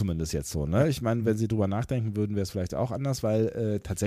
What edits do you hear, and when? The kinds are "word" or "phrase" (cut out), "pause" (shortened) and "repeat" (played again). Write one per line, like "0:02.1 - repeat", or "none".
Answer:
none

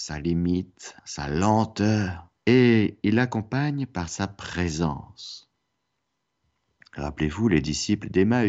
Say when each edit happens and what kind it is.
0:01.0 - pause
0:02.4 - pause

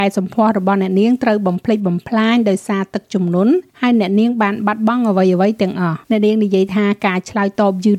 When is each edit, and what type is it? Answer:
0:03.7 - pause
0:06.0 - pause

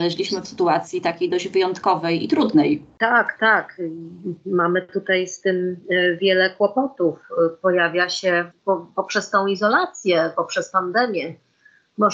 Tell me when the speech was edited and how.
0:08.5 - pause

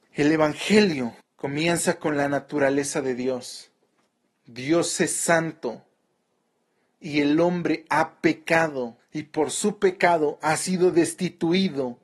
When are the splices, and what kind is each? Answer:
0:01.2 - pause
0:04.1 - pause
0:09.0 - pause

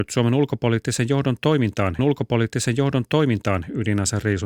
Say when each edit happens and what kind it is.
0:02.0 - repeat

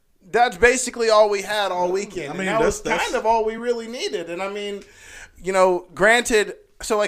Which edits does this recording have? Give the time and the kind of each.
none

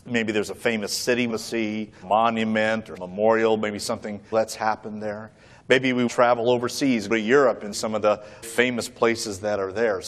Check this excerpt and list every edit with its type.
0:01.3 - word
0:02.0 - word
0:03.0 - word
0:04.3 - word
0:06.1 - word
0:07.1 - word
0:07.7 - word
0:08.4 - word

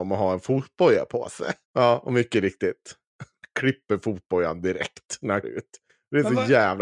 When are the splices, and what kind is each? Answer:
0:01.6 - pause
0:05.4 - word

